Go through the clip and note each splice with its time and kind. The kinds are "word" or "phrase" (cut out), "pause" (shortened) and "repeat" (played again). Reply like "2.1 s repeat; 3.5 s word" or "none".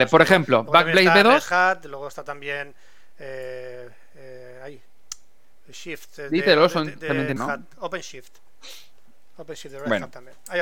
7.4 s word